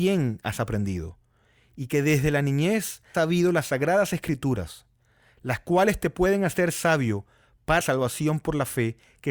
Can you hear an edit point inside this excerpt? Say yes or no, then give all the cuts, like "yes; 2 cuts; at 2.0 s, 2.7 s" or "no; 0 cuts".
yes; 2 cuts; at 3.1 s, 7.8 s